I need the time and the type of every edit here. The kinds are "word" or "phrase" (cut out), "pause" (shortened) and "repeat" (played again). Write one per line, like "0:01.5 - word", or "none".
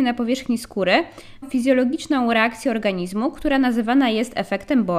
0:01.4 - word